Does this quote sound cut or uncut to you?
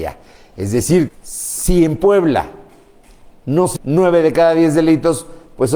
cut